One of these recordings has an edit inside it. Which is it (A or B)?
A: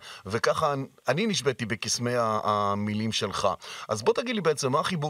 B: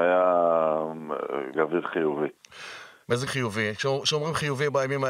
B